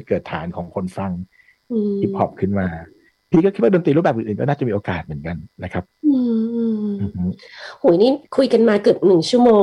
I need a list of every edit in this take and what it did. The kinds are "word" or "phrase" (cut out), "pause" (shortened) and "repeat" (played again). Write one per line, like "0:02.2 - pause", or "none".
none

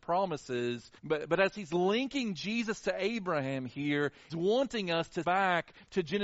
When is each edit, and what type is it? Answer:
0:01.0 - pause
0:04.3 - word
0:05.2 - word

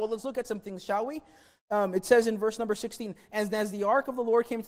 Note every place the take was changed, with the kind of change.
none

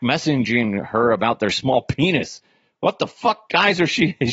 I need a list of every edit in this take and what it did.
none

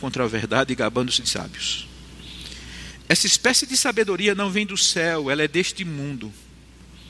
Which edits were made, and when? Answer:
0:01.2 - word

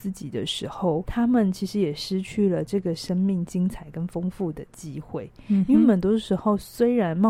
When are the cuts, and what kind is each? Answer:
0:01.1 - word

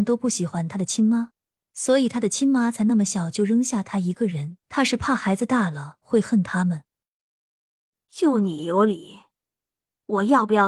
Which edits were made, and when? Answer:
0:04.6 - pause

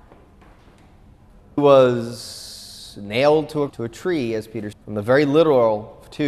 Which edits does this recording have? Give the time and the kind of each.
0:01.6 - word
0:03.7 - word
0:04.7 - word

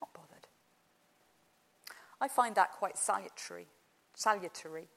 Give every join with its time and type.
none

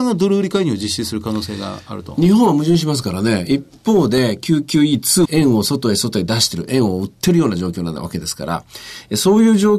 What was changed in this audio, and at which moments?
0:05.2 - phrase

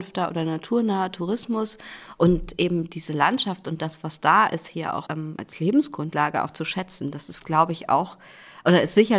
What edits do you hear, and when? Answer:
0:05.1 - word

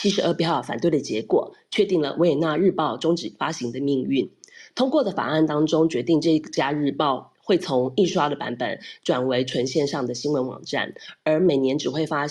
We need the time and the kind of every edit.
none

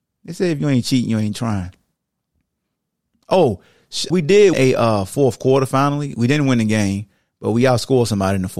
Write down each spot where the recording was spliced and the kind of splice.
0:04.1 - word
0:04.5 - word

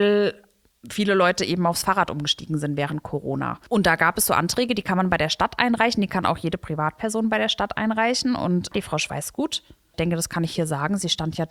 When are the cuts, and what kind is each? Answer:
none

